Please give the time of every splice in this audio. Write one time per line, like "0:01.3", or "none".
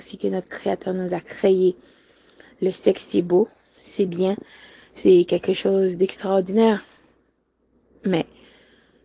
none